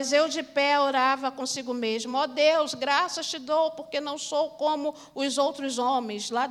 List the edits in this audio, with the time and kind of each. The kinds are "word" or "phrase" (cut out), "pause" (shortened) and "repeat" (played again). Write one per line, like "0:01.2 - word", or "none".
none